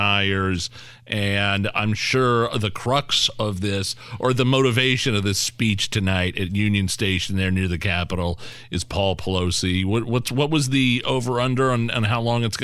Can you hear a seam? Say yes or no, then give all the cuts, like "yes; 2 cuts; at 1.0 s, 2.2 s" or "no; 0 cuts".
no; 0 cuts